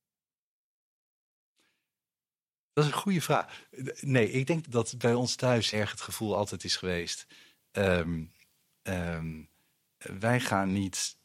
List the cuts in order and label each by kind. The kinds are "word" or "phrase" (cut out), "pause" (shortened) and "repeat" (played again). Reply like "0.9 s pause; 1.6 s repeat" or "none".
4.6 s word; 5.7 s word